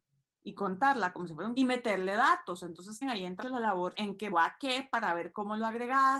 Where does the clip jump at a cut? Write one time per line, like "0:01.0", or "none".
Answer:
0:01.6
0:03.0
0:03.4
0:03.9
0:04.3